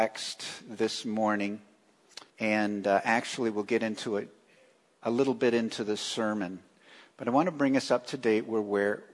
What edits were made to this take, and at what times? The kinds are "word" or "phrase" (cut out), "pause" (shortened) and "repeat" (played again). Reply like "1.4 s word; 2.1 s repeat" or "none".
2.3 s pause